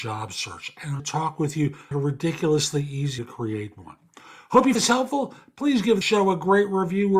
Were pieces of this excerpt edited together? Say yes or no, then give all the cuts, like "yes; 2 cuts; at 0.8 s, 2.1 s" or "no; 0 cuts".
yes; 5 cuts; at 1.0 s, 1.9 s, 3.2 s, 4.7 s, 6.0 s